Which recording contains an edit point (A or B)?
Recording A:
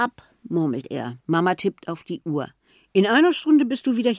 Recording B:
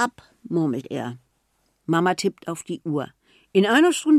A